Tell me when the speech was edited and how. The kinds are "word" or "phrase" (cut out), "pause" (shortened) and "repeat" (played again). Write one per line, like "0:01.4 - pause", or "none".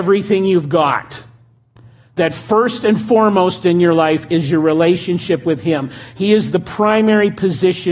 none